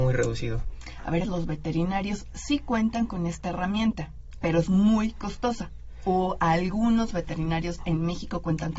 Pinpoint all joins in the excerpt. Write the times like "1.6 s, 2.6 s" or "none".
1.2 s